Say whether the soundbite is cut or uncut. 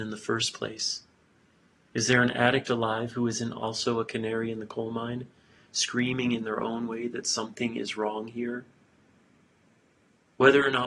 uncut